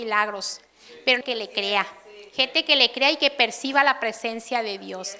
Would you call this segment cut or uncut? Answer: cut